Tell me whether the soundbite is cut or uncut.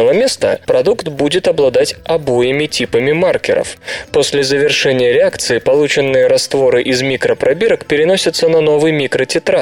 uncut